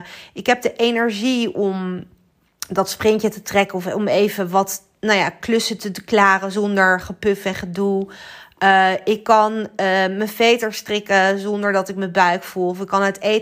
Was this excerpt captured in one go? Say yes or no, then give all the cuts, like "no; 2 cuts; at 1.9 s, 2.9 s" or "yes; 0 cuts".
yes; 0 cuts